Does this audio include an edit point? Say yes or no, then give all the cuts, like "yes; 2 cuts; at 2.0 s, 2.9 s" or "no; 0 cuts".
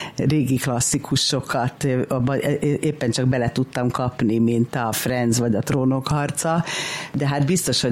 no; 0 cuts